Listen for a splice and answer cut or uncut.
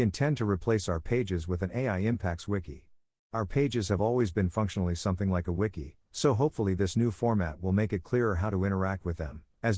uncut